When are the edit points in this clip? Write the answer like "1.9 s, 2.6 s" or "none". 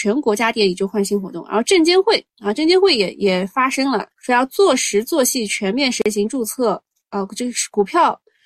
4.1 s